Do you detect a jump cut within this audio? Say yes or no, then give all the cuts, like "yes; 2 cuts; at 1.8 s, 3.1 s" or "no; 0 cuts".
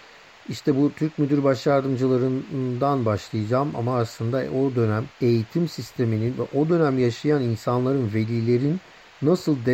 yes; 1 cut; at 5.1 s